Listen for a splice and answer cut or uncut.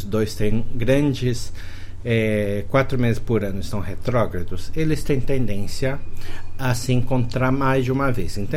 uncut